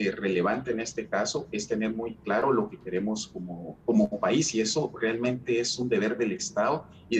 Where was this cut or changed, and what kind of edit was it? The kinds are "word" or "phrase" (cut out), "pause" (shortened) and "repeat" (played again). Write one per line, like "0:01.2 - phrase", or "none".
0:03.8 - pause